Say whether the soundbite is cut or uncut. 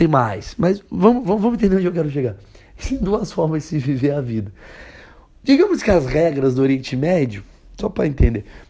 uncut